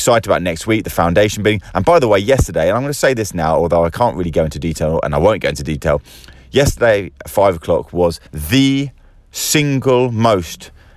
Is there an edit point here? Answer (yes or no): yes